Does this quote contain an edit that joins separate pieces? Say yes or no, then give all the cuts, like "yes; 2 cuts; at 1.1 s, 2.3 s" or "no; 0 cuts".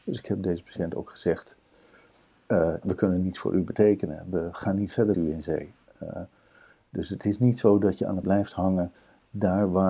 yes; 3 cuts; at 2.8 s, 5.1 s, 8.2 s